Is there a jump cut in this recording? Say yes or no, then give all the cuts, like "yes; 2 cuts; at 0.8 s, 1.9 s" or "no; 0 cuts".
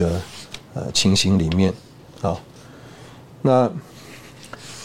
no; 0 cuts